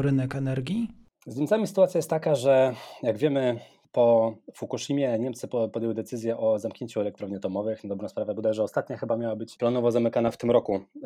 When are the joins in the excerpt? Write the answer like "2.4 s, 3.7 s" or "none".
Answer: none